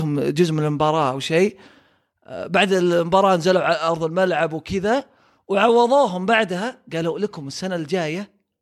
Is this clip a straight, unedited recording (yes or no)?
yes